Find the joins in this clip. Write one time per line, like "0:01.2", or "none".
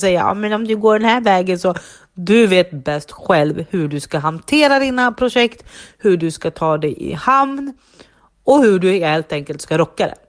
none